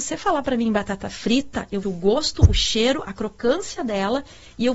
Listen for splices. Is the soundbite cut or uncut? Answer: cut